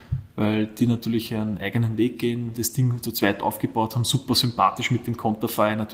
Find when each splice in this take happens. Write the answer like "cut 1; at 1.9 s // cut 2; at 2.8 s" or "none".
none